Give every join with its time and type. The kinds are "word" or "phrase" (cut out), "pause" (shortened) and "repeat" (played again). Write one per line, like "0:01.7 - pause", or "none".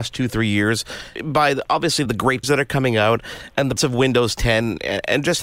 0:01.2 - word
0:02.1 - word
0:02.4 - word
0:03.8 - word